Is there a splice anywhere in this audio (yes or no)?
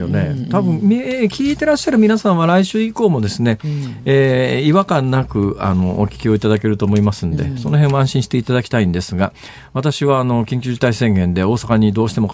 no